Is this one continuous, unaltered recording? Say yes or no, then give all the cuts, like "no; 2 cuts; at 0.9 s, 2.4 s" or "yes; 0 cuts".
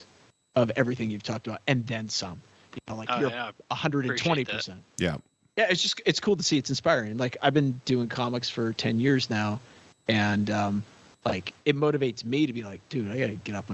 yes; 0 cuts